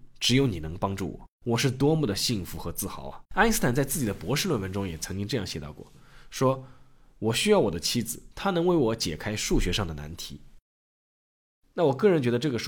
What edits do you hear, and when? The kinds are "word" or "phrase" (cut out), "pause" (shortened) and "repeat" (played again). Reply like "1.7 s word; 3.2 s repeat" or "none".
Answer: 1.3 s pause; 3.3 s pause; 8.3 s pause; 10.6 s pause